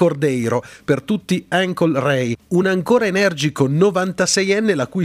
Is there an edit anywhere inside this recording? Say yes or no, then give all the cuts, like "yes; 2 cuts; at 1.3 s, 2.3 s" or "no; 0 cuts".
no; 0 cuts